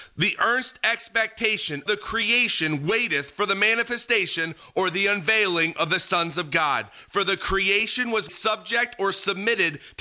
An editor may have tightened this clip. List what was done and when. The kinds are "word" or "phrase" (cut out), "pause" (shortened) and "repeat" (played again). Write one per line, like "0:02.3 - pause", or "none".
0:01.9 - word
0:08.3 - word